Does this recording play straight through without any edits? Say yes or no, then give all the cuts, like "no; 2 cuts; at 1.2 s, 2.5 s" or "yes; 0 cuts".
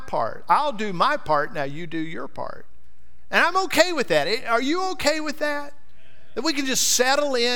yes; 0 cuts